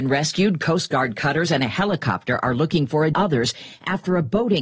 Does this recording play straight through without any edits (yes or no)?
no